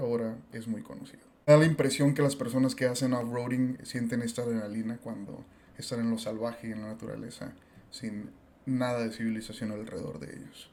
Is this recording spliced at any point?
no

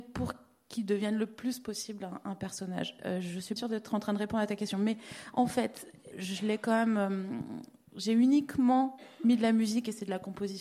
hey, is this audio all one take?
no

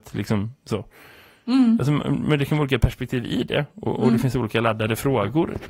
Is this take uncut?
yes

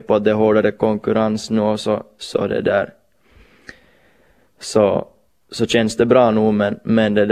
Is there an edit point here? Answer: no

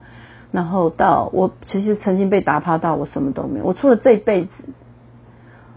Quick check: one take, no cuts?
yes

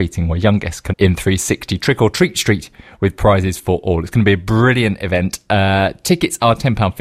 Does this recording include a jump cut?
yes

